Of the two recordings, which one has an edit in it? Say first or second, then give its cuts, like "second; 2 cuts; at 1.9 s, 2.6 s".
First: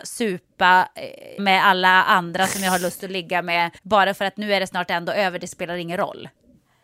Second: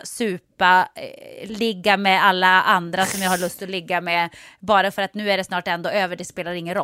first; 2 cuts; at 1.4 s, 3.8 s